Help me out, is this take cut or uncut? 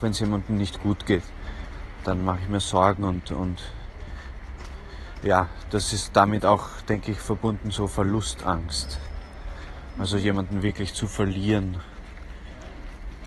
uncut